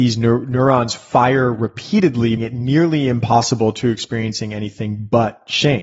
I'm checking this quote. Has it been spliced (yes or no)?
yes